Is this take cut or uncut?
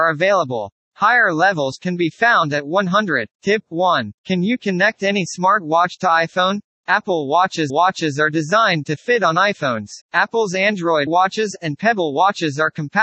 cut